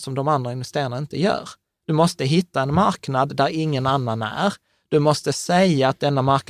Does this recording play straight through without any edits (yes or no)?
yes